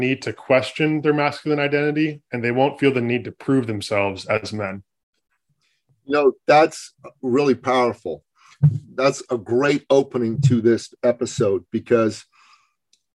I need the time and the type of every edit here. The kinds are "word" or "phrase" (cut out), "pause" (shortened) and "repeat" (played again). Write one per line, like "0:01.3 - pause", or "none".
none